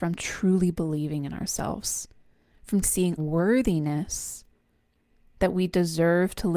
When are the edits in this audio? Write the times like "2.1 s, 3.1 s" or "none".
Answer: 2.8 s, 3.2 s